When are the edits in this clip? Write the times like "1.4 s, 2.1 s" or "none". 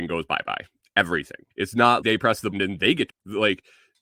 1.5 s, 2.0 s, 2.5 s, 3.1 s